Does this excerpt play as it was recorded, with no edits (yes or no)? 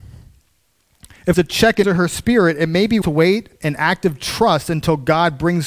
no